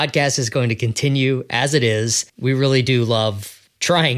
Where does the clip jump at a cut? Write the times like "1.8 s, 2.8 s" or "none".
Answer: 2.3 s